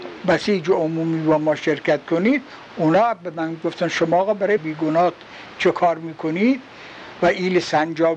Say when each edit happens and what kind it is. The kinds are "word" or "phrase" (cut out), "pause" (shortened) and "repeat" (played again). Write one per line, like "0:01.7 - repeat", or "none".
0:04.6 - word